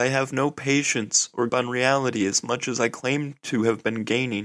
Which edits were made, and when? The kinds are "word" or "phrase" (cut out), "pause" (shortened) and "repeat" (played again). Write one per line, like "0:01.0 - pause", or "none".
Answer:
0:01.5 - word